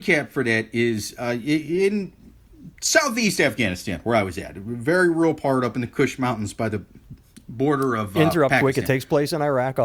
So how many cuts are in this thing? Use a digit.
1